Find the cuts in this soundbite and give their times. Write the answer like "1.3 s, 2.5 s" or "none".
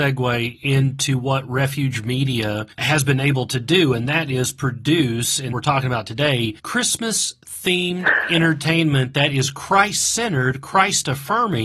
2.7 s, 5.5 s, 6.6 s